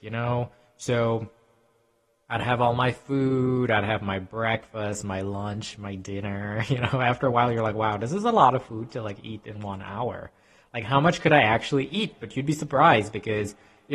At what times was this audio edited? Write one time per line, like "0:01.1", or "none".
none